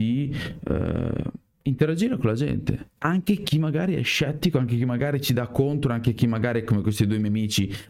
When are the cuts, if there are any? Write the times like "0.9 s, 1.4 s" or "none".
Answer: 1.5 s, 2.9 s

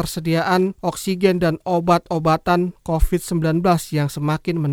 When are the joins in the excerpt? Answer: none

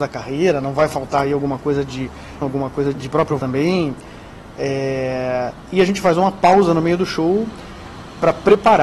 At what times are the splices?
2.4 s, 2.9 s, 3.4 s

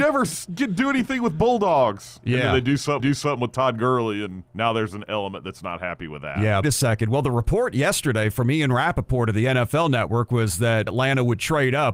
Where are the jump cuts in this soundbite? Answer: 3.0 s, 4.5 s, 6.6 s, 10.9 s

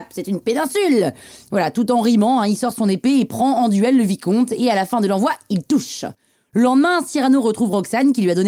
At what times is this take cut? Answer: none

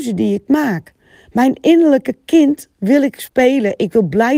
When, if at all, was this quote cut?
none

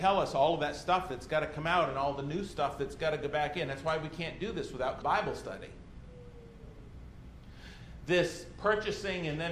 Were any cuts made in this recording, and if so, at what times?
5.0 s

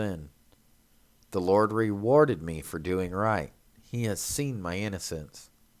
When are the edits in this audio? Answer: none

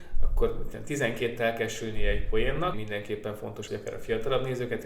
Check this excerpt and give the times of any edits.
1.4 s, 2.7 s, 3.7 s

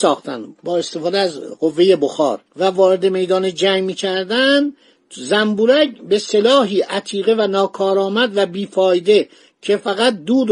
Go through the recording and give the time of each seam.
2.5 s

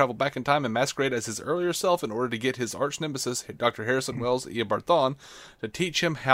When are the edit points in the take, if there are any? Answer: none

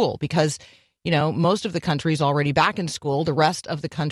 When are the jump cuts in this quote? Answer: none

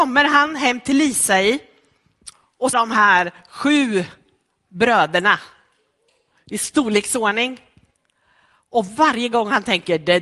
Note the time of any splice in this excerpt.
2.7 s

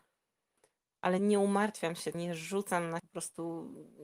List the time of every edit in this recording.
1.2 s, 2.1 s, 3.0 s

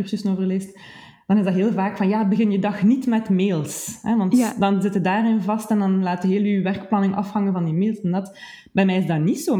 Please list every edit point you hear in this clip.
none

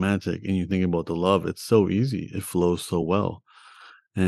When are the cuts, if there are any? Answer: none

